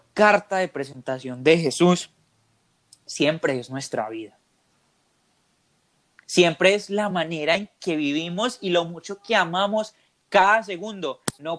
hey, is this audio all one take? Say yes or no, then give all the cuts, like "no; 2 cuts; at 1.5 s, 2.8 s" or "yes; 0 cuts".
yes; 0 cuts